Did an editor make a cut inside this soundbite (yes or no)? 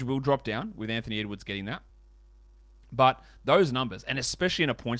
no